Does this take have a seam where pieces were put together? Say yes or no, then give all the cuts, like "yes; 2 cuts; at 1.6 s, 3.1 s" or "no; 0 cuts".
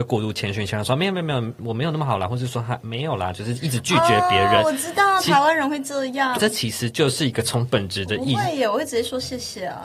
yes; 1 cut; at 6.3 s